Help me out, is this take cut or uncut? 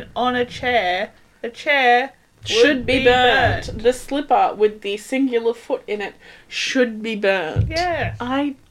uncut